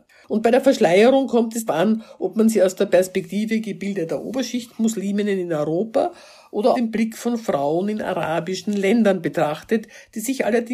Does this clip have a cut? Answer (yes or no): yes